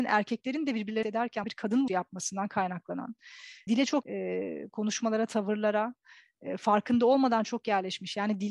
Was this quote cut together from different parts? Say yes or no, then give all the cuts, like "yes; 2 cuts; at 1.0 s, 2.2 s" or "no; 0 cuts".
yes; 5 cuts; at 1.0 s, 1.4 s, 1.9 s, 3.7 s, 4.0 s